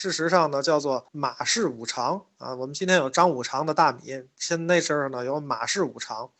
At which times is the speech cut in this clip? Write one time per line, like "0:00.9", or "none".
0:01.1